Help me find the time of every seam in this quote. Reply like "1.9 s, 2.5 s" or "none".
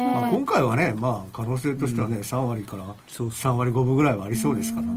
3.0 s

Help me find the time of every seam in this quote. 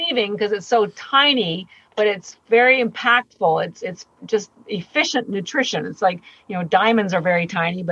none

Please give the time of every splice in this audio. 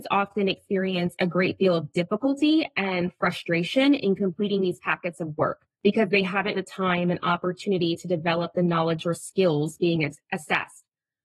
5.7 s, 6.5 s

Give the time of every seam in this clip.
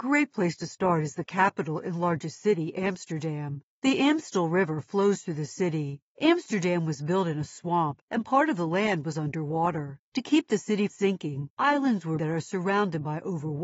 10.9 s, 12.2 s

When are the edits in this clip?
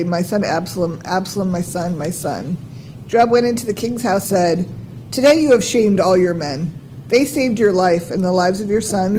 4.2 s

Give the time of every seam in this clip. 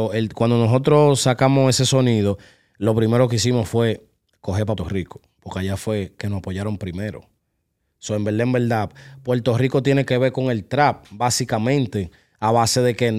4.8 s

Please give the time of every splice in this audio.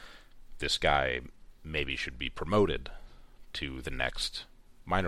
none

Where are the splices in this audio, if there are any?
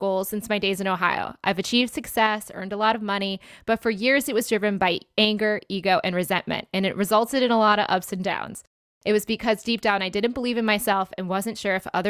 none

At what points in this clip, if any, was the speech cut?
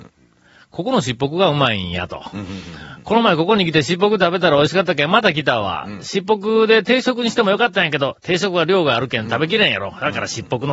none

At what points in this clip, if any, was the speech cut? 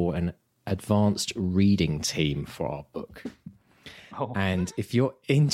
none

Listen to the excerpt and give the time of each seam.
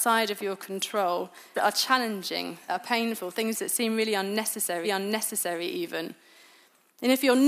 1.5 s, 2.7 s, 4.8 s

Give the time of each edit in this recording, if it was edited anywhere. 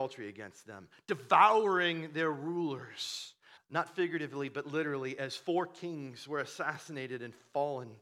3.6 s

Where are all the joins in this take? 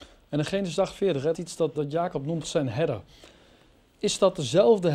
1.3 s, 1.7 s, 2.4 s

